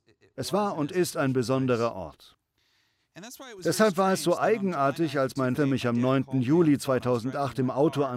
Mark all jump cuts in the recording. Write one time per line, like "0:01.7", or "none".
0:05.6